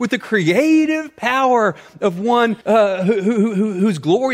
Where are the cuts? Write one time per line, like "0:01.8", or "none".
0:02.6